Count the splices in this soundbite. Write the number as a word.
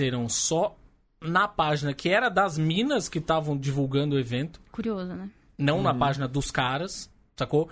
zero